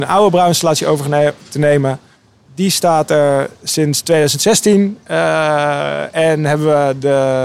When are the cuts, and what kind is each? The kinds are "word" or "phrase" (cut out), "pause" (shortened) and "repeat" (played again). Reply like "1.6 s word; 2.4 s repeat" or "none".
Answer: none